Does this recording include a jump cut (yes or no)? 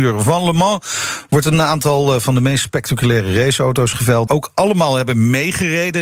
yes